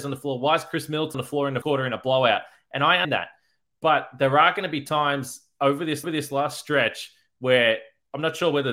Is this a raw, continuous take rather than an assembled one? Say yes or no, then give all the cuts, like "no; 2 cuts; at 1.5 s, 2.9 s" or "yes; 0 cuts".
no; 4 cuts; at 1.1 s, 1.6 s, 3.0 s, 6.0 s